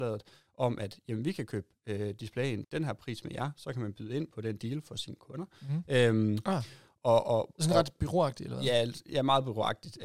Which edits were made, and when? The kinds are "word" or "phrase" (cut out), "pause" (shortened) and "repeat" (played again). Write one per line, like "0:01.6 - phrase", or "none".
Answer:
0:02.6 - word